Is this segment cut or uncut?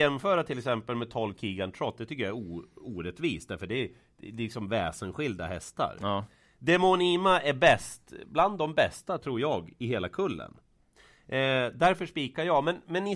uncut